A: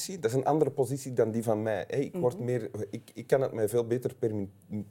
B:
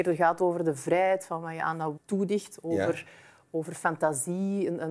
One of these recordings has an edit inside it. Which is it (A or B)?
B